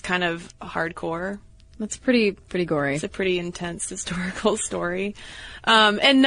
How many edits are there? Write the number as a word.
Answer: zero